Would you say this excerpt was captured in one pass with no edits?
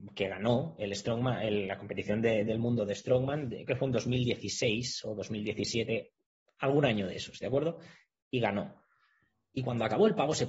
no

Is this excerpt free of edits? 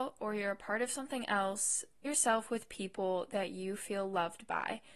no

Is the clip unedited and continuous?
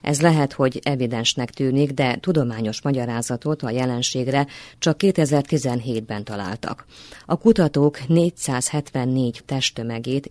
no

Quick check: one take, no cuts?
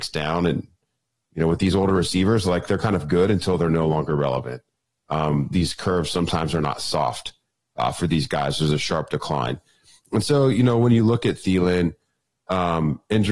yes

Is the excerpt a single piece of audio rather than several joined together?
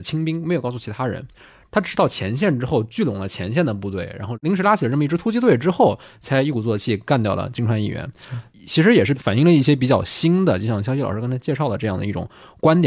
yes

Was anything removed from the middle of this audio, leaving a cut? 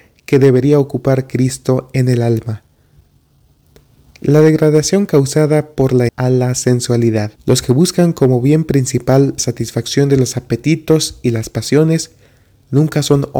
yes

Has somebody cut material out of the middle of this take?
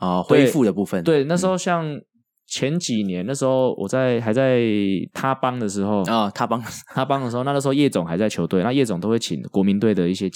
no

